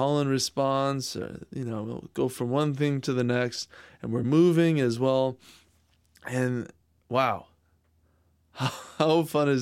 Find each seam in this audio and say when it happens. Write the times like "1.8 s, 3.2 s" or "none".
none